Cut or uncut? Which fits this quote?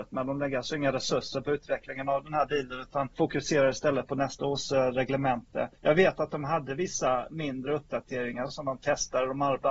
cut